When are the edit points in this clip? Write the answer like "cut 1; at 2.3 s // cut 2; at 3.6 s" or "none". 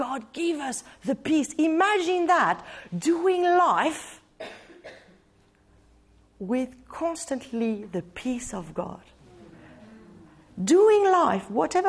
none